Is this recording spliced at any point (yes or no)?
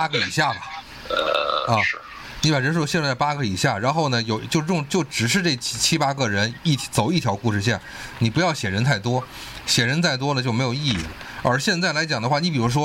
no